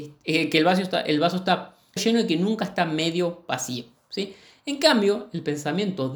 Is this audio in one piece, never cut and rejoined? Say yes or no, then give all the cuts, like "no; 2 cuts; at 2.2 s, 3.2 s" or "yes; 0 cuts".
no; 1 cut; at 2.0 s